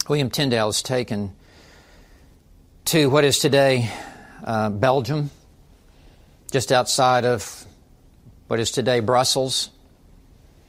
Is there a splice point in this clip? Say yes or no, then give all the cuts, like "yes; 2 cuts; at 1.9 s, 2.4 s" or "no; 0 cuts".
no; 0 cuts